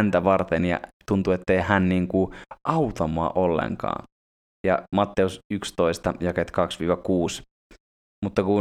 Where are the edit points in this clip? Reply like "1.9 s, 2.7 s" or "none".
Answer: none